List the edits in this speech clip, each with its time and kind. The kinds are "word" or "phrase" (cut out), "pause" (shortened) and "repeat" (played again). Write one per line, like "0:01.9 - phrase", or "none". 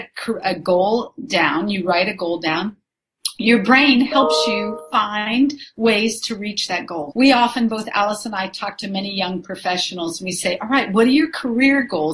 0:07.1 - word